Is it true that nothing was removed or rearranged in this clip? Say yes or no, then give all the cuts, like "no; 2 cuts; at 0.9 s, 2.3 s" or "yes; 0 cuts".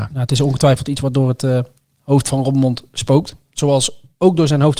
yes; 0 cuts